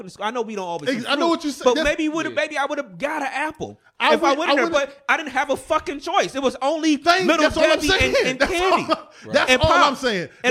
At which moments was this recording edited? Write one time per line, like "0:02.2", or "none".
none